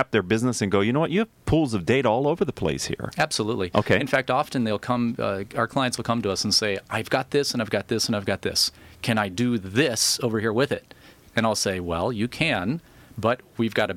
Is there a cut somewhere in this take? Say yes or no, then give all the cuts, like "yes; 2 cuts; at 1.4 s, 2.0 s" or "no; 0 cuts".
no; 0 cuts